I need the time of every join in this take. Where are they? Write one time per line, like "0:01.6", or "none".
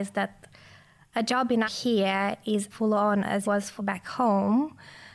0:01.6
0:02.7
0:03.4
0:03.8